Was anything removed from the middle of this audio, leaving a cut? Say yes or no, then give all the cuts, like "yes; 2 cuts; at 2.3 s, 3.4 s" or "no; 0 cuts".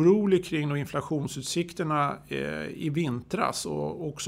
no; 0 cuts